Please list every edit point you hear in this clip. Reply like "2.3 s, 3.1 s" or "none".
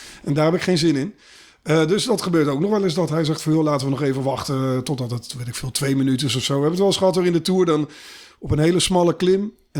none